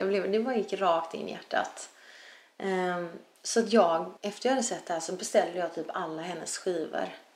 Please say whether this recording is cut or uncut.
cut